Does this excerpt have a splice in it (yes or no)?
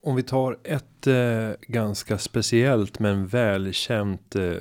no